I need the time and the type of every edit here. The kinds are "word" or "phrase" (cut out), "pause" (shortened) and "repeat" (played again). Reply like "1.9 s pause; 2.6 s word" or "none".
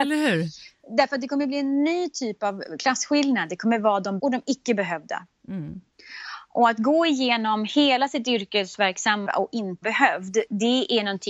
4.2 s word; 9.2 s word; 9.8 s word